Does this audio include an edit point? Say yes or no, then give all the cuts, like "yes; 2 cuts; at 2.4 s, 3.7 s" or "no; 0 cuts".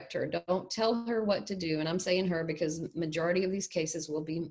no; 0 cuts